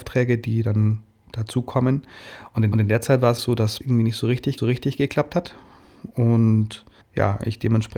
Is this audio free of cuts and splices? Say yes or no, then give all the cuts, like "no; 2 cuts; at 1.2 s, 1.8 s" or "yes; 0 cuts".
no; 5 cuts; at 2.7 s, 3.4 s, 3.8 s, 4.6 s, 7.0 s